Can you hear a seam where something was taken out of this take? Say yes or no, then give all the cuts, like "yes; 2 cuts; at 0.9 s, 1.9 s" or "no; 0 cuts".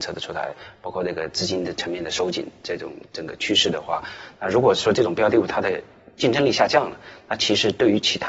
no; 0 cuts